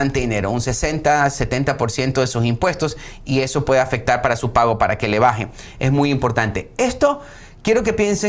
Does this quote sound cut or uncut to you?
uncut